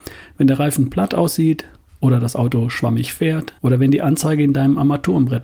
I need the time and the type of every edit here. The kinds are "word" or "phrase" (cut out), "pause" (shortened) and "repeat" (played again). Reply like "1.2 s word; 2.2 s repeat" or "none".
3.6 s pause